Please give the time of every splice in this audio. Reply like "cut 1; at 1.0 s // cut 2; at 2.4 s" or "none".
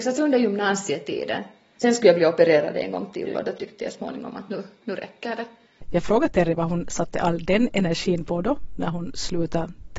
none